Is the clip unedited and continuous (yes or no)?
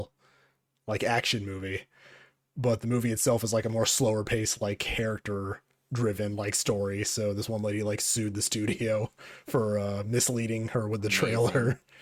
yes